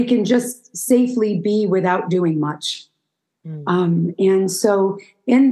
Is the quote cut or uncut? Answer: uncut